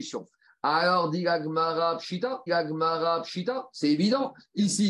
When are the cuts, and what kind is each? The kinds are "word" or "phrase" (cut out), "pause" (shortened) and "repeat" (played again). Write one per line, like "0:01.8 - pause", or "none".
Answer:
0:02.5 - repeat